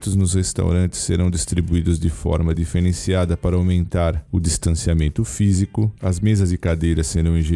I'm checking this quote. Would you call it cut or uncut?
uncut